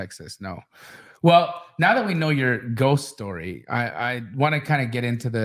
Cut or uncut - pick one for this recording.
uncut